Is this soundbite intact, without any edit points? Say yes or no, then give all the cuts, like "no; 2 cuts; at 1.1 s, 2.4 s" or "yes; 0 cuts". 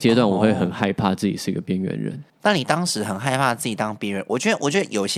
no; 1 cut; at 2.3 s